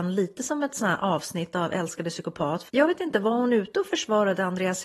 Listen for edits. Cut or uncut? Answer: cut